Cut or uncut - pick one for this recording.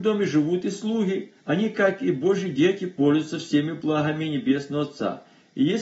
cut